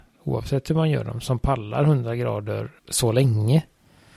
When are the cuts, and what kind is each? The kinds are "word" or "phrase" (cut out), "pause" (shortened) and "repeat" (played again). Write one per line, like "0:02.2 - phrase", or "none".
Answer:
0:02.8 - pause